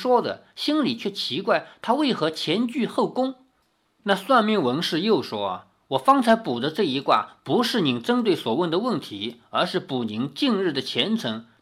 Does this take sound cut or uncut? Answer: uncut